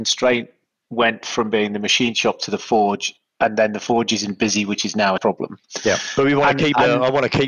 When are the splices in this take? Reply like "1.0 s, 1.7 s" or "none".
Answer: 5.2 s